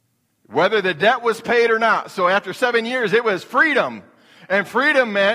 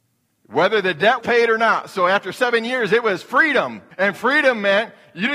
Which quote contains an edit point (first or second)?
second